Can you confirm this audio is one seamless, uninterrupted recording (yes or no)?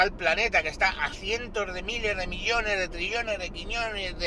yes